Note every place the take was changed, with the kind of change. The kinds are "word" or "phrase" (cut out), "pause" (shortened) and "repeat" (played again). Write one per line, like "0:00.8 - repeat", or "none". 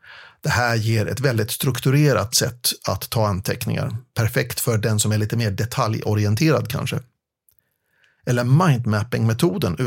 0:02.3 - word